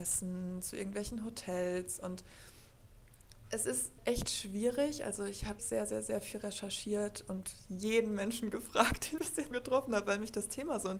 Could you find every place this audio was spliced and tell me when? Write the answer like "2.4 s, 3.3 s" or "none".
5.6 s, 9.2 s, 9.5 s